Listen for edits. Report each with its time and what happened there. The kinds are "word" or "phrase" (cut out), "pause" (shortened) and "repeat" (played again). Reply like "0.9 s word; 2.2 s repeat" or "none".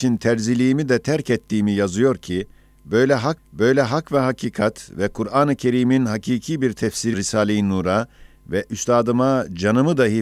3.4 s repeat; 7.1 s word